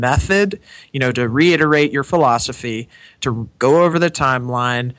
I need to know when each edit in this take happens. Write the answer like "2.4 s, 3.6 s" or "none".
none